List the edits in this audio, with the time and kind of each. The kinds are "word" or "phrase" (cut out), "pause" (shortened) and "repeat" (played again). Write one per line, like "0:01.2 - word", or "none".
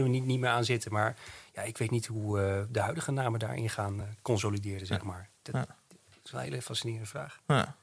none